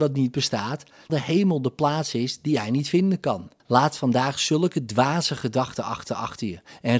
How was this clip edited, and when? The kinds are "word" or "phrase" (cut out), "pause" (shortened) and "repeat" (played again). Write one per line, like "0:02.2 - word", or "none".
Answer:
0:01.1 - word
0:03.6 - pause
0:06.1 - repeat